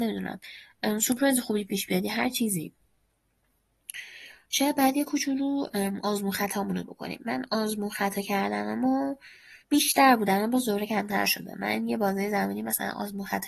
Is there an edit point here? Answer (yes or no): yes